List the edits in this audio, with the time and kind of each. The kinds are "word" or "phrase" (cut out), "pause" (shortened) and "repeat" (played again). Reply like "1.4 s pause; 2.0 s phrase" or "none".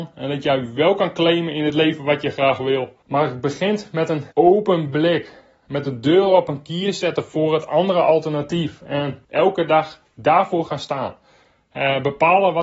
3.0 s pause; 4.3 s pause; 9.2 s pause